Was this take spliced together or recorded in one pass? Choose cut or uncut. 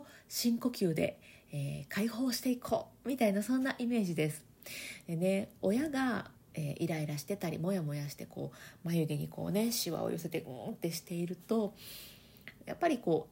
cut